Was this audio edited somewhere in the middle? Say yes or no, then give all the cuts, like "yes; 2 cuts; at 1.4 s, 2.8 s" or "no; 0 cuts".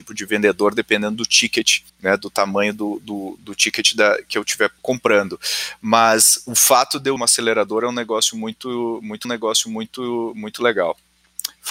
yes; 5 cuts; at 1.9 s, 3.4 s, 4.8 s, 7.2 s, 9.2 s